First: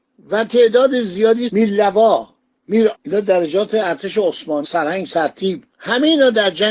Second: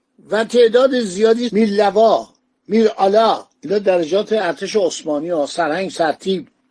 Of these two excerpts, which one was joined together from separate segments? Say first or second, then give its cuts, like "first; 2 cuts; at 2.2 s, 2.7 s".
first; 3 cuts; at 2.9 s, 4.6 s, 5.7 s